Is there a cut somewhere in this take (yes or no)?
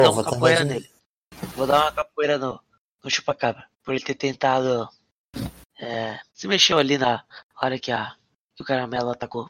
yes